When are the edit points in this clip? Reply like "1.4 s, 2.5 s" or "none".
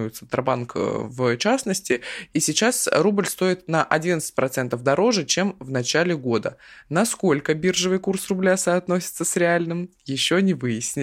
none